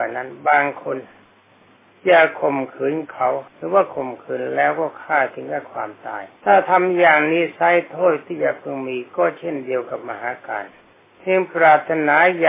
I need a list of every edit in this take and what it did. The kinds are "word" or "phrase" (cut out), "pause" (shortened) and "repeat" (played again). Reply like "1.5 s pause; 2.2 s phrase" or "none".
3.5 s pause; 6.4 s pause; 10.8 s pause

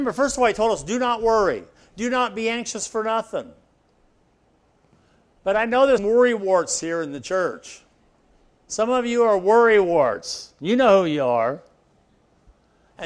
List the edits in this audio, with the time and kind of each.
6.0 s word

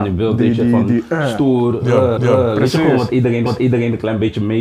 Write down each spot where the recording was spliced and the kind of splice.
2.2 s repeat; 3.5 s repeat

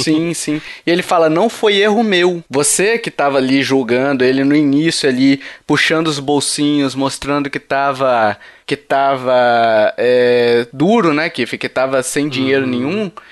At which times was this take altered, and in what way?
none

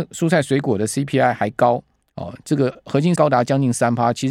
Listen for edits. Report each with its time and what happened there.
3.2 s word

